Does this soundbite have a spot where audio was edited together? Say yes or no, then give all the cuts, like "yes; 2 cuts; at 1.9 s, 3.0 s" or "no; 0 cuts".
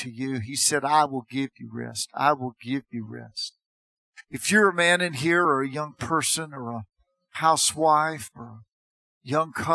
no; 0 cuts